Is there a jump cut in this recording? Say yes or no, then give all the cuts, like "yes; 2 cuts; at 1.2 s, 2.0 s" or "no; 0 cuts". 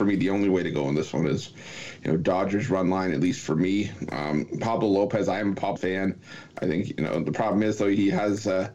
yes; 1 cut; at 5.8 s